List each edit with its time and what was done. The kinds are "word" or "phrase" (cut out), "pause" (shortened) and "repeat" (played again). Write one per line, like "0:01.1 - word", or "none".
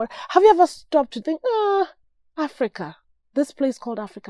0:01.2 - word
0:02.0 - pause